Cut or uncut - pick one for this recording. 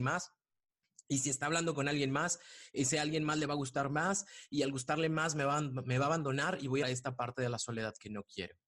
cut